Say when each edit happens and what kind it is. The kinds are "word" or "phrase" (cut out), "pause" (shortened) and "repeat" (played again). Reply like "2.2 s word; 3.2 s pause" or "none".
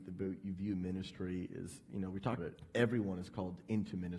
2.4 s word